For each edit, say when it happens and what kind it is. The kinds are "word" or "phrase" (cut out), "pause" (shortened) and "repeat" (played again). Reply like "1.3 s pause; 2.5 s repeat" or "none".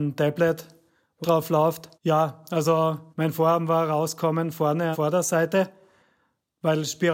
1.2 s phrase; 1.9 s pause; 3.1 s pause; 4.9 s phrase

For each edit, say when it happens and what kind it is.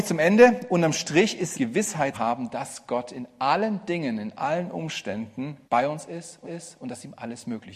1.5 s phrase; 2.1 s word; 5.6 s pause; 6.4 s repeat

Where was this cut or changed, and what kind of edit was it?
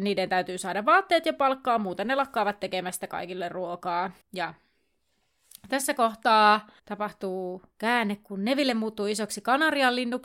4.2 s pause; 6.8 s pause

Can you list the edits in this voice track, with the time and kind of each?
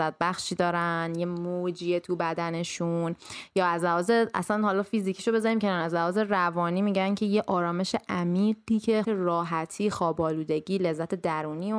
9.0 s word

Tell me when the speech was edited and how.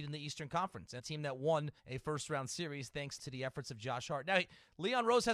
1.0 s word; 1.8 s pause; 3.2 s word

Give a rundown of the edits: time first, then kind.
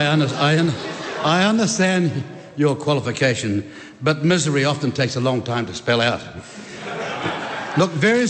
none

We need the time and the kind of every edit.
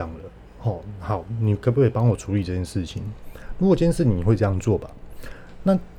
none

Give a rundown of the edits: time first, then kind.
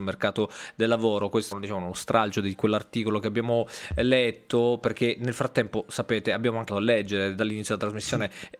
1.5 s word; 6.7 s word

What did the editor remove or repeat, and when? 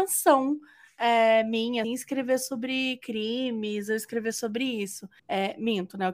1.8 s word; 5.2 s pause

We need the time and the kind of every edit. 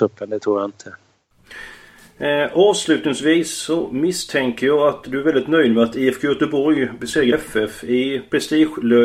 7.3 s word

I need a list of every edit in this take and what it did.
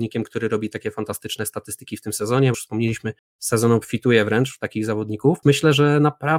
2.5 s phrase; 5.4 s word

